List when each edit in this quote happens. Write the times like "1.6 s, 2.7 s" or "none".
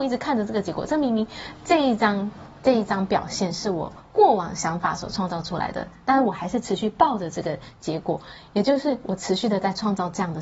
4.1 s